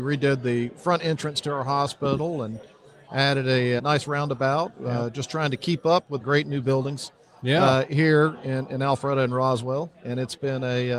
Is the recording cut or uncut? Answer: cut